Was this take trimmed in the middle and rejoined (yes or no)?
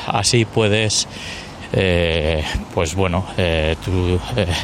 no